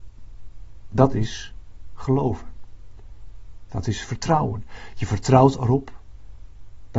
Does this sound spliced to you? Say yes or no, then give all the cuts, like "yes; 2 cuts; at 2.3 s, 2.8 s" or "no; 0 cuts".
no; 0 cuts